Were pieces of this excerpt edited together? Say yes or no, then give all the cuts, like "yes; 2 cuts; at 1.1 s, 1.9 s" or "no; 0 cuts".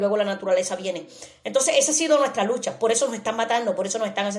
no; 0 cuts